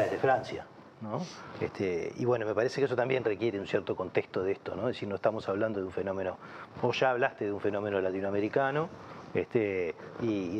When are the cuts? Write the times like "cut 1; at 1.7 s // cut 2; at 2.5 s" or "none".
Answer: none